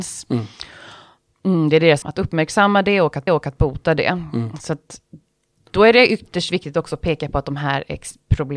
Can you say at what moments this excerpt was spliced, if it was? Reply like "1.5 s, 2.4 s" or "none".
2.0 s, 3.3 s